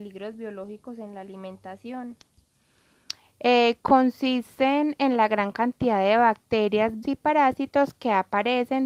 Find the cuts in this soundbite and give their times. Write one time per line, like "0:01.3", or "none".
0:07.0